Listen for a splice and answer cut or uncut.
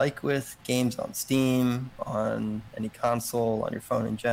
uncut